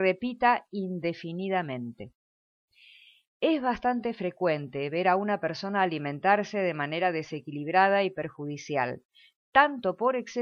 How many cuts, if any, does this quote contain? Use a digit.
0